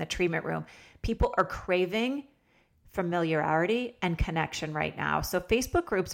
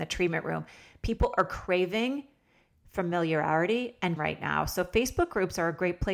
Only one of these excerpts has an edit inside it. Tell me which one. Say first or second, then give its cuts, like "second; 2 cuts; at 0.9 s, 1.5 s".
second; 1 cut; at 4.2 s